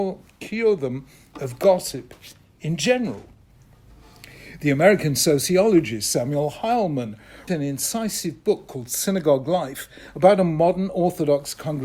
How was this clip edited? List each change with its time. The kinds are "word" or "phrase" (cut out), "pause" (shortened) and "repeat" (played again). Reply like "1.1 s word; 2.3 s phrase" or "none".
7.5 s word